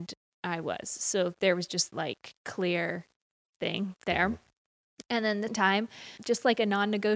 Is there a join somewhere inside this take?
yes; 3 cuts; at 1.9 s, 5.5 s, 6.2 s

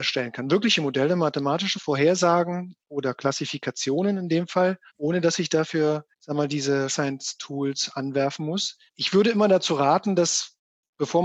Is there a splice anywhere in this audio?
yes; 5 cuts; at 1.7 s, 4.9 s, 6.1 s, 6.9 s, 8.9 s

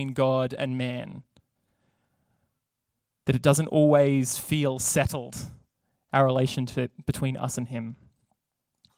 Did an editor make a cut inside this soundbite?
no; 0 cuts

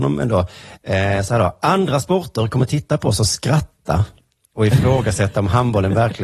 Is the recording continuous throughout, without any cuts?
yes; 0 cuts

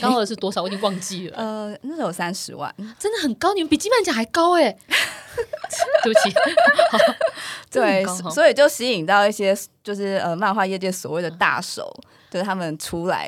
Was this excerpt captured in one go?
yes; 0 cuts

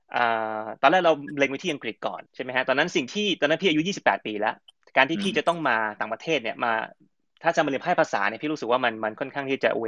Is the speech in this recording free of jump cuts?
no; 1 cut; at 2.2 s

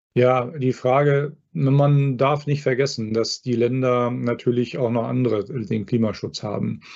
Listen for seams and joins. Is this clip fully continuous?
no; 1 cut; at 5.7 s

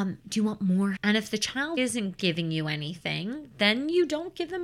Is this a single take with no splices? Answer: no; 2 cuts; at 1.0 s, 1.8 s

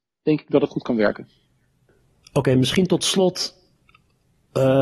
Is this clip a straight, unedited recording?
yes; 0 cuts

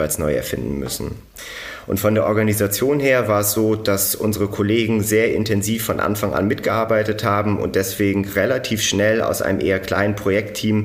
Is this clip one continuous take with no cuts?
yes; 0 cuts

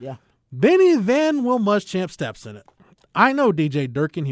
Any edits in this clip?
no; 0 cuts

